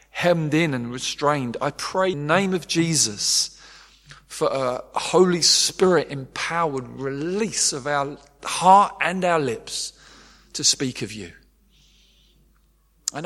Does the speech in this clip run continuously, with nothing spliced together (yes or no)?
no